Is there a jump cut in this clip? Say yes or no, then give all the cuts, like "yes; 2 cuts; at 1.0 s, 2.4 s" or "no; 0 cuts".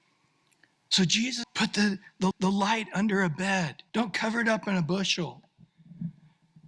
yes; 3 cuts; at 1.4 s, 2.3 s, 3.9 s